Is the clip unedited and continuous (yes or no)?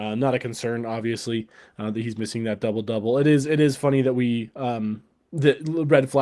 yes